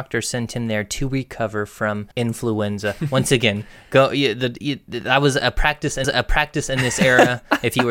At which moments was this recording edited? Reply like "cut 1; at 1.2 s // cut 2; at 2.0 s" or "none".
cut 1; at 2.1 s // cut 2; at 6.0 s